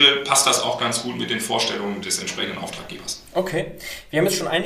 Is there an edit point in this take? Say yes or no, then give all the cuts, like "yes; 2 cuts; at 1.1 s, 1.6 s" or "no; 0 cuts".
yes; 1 cut; at 2.0 s